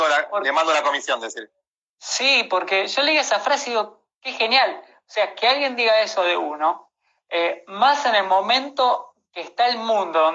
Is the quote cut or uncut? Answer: uncut